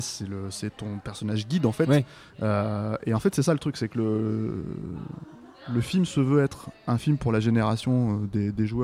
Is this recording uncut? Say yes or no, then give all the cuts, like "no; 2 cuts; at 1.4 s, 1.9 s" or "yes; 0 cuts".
yes; 0 cuts